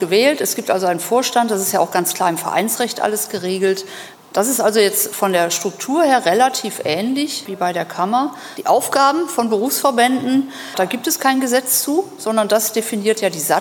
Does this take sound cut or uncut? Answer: uncut